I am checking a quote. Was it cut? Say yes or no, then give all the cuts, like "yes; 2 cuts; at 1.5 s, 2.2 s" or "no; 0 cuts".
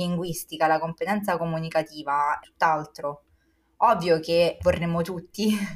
yes; 2 cuts; at 2.4 s, 4.6 s